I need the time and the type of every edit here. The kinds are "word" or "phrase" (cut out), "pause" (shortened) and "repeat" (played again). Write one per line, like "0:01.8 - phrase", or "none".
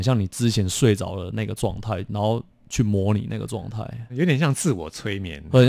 0:04.1 - word